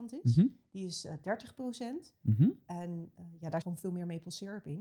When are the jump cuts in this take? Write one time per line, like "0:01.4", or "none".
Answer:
0:03.6